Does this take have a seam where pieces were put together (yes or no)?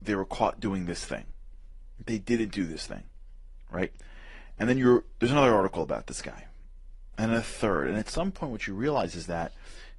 no